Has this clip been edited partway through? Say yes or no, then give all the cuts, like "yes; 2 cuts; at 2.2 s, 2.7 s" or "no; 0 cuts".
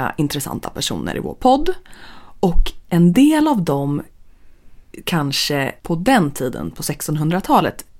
yes; 1 cut; at 5.8 s